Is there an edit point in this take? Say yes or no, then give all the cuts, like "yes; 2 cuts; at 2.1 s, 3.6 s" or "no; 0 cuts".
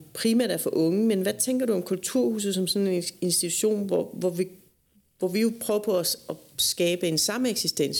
no; 0 cuts